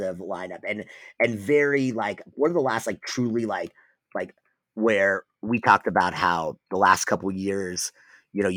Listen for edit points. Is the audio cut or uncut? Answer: uncut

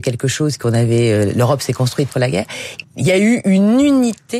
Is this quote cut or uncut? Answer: cut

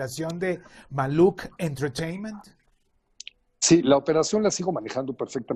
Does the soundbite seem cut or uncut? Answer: uncut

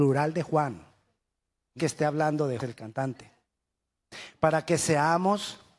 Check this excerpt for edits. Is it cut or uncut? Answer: cut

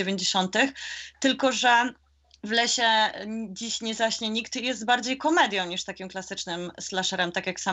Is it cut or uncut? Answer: uncut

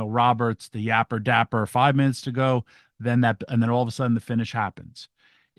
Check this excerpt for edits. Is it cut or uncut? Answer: uncut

